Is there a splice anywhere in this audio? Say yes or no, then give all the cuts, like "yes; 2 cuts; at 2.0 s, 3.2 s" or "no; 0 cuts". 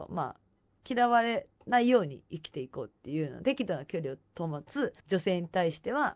yes; 2 cuts; at 1.5 s, 5.0 s